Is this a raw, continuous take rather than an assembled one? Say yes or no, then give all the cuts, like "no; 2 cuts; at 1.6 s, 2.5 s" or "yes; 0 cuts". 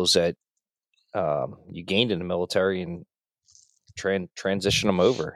yes; 0 cuts